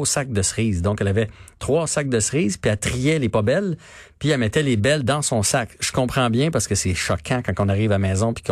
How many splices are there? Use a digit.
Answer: 0